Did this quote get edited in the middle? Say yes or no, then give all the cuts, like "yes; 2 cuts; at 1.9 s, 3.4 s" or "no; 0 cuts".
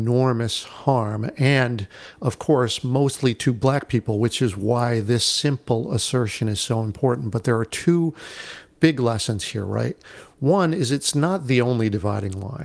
no; 0 cuts